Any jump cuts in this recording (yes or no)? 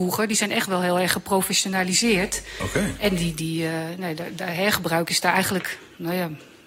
no